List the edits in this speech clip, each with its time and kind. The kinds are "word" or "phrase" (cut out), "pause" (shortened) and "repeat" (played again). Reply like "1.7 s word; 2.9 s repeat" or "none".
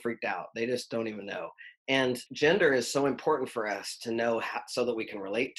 2.3 s pause